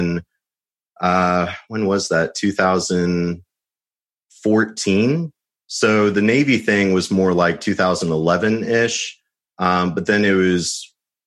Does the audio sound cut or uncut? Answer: uncut